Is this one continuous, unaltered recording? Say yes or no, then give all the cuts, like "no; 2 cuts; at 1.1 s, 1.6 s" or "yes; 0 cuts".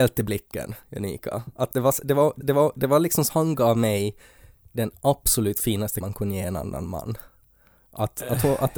no; 3 cuts; at 2.4 s, 3.3 s, 6.0 s